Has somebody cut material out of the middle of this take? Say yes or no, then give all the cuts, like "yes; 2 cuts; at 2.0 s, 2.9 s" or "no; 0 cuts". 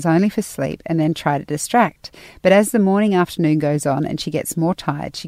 no; 0 cuts